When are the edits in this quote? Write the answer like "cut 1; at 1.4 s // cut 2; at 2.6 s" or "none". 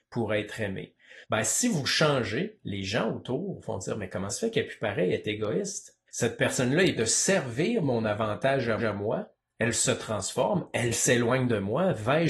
cut 1; at 1.2 s // cut 2; at 4.3 s // cut 3; at 6.1 s // cut 4; at 7.0 s // cut 5; at 8.8 s // cut 6; at 10.9 s